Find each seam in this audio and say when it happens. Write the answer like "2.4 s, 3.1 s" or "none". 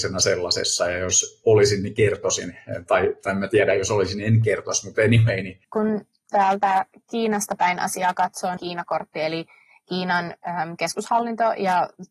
5.6 s, 8.6 s

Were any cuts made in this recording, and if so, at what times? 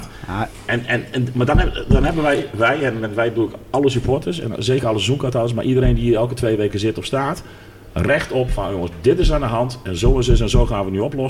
none

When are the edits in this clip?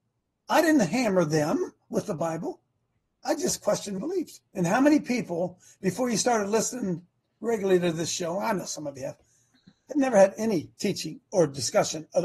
4.0 s, 4.5 s

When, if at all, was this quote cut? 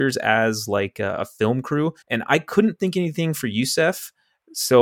2.0 s

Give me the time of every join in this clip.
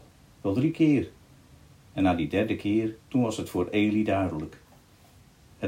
3.0 s

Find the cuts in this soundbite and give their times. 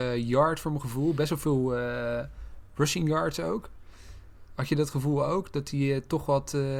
none

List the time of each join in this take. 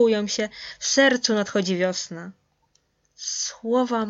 none

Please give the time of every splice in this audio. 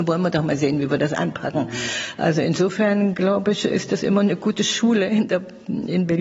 3.7 s

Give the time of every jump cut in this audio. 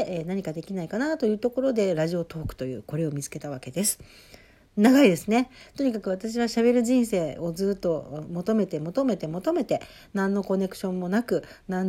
8.2 s

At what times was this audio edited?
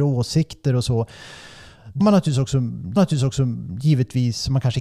2.0 s, 3.0 s

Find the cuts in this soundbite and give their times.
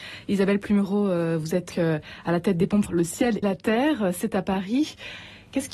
1.7 s, 2.9 s, 3.4 s

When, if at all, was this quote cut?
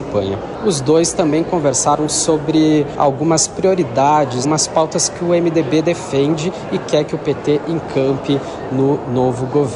4.4 s

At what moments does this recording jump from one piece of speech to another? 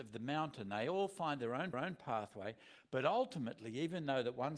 1.7 s

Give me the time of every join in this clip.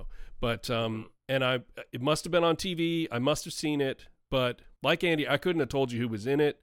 1.2 s, 4.8 s

